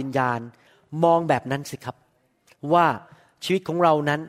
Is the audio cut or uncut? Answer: uncut